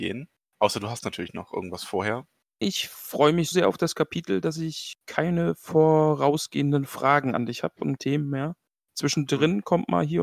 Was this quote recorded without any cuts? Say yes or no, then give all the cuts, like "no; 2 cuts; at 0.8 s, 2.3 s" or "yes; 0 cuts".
no; 3 cuts; at 2.6 s, 3.5 s, 8.0 s